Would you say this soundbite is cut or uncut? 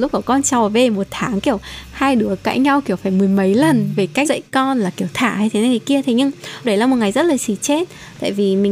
cut